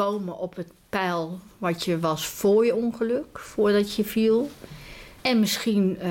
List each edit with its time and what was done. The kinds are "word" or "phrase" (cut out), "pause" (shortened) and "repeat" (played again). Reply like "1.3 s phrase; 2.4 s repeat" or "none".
5.2 s pause